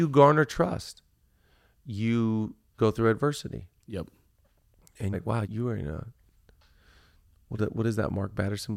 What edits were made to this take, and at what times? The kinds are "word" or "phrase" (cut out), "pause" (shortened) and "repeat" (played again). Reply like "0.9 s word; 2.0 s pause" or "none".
2.8 s word; 5.1 s word; 5.4 s word; 7.6 s word